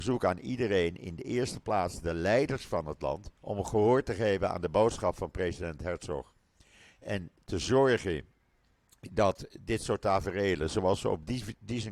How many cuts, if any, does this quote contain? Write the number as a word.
one